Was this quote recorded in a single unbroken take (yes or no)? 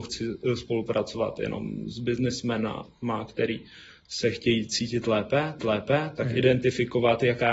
no